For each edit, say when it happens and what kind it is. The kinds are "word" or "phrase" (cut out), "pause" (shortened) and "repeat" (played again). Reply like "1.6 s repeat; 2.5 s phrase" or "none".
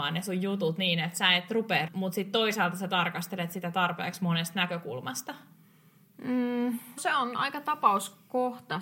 1.9 s word; 7.0 s word